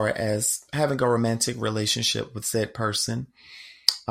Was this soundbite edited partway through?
no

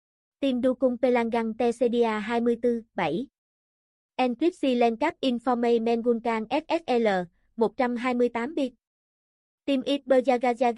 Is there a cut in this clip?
no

